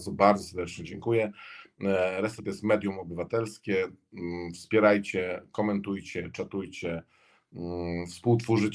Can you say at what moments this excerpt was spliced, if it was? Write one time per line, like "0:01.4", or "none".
0:02.4